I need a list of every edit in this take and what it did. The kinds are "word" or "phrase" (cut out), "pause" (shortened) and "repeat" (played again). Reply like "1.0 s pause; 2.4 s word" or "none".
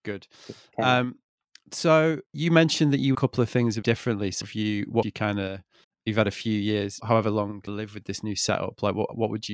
2.3 s pause; 3.1 s phrase; 3.8 s word; 4.4 s word; 5.0 s phrase; 5.8 s pause; 7.0 s word; 7.7 s phrase